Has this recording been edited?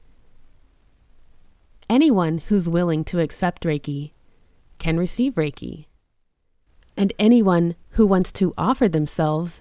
yes; 1 cut; at 6.7 s

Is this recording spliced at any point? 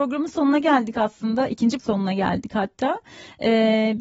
yes; 1 cut; at 1.8 s

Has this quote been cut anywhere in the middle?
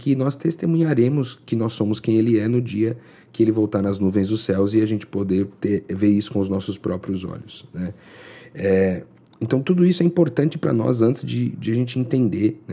no; 0 cuts

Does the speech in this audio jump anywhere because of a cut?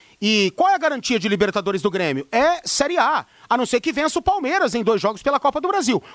no; 0 cuts

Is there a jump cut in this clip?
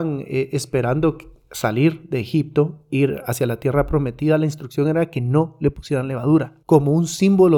yes; 1 cut; at 6.6 s

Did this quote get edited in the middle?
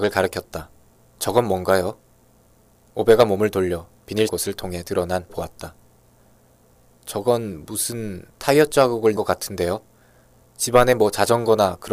yes; 6 cuts; at 1.0 s, 2.3 s, 4.3 s, 5.3 s, 8.3 s, 9.2 s

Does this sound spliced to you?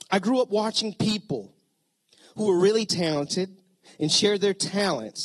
no; 0 cuts

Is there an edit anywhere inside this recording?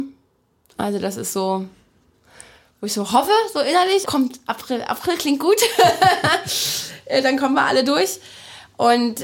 yes; 1 cut; at 4.0 s

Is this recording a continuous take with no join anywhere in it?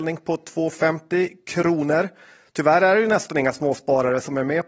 yes; 0 cuts

